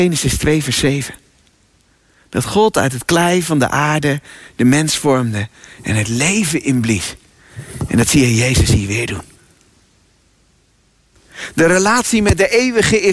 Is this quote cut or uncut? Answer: uncut